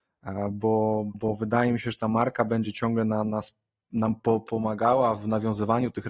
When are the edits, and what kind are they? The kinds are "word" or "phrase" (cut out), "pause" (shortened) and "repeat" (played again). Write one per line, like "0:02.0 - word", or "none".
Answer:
0:01.1 - word